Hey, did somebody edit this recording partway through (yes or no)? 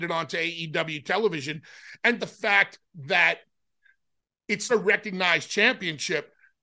yes